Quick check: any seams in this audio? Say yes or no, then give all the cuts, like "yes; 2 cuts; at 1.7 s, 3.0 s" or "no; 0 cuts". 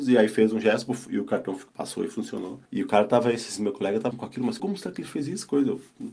yes; 4 cuts; at 1.7 s, 2.6 s, 4.1 s, 4.6 s